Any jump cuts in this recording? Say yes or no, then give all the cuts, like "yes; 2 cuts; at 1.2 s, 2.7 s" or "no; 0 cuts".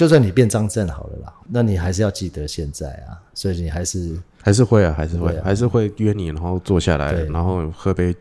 yes; 1 cut; at 1.4 s